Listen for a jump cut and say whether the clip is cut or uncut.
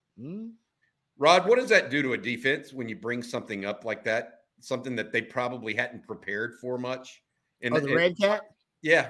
uncut